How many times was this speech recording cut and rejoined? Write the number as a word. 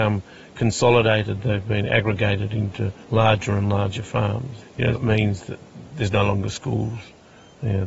two